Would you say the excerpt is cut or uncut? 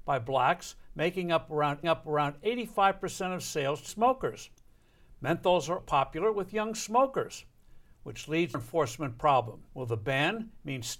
cut